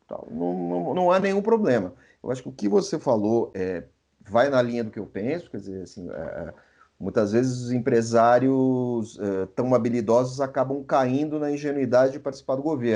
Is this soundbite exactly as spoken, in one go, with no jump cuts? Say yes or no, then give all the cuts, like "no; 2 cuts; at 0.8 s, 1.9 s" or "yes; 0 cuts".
yes; 0 cuts